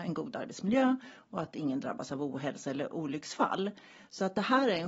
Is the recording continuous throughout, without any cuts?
yes; 0 cuts

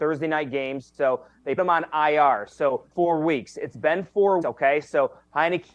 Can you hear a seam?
yes; 3 cuts; at 1.6 s, 2.9 s, 4.4 s

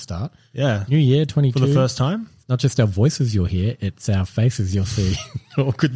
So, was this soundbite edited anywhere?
no; 0 cuts

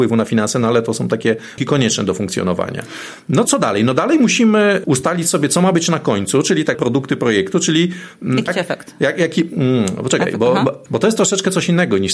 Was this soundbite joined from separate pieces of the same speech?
yes; 6 cuts; at 1.6 s, 3.4 s, 4.8 s, 6.7 s, 8.5 s, 10.9 s

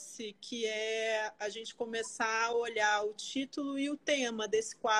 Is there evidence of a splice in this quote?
no; 0 cuts

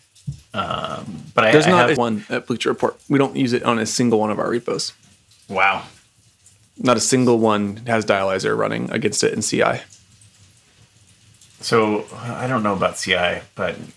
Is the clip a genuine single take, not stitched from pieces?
no; 1 cut; at 2.0 s

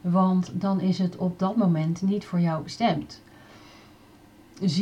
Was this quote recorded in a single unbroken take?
yes; 0 cuts

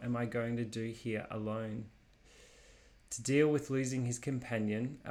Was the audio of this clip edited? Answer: no; 0 cuts

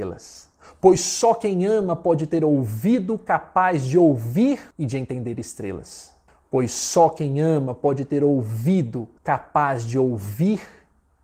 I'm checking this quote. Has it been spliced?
yes; 3 cuts; at 4.7 s, 6.3 s, 9.2 s

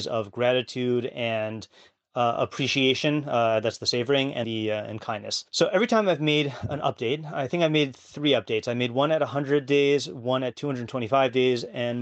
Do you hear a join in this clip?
yes; 2 cuts; at 4.4 s, 5.5 s

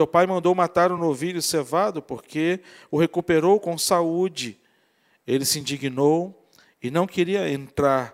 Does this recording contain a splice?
no; 0 cuts

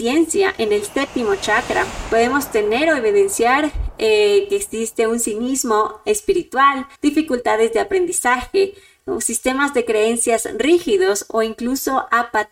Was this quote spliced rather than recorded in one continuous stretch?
yes; 1 cut; at 6.9 s

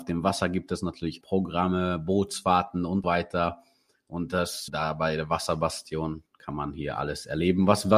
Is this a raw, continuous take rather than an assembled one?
no; 4 cuts; at 1.2 s, 3.0 s, 4.7 s, 6.3 s

